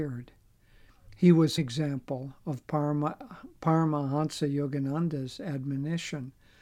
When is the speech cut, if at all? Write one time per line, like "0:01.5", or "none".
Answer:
0:01.6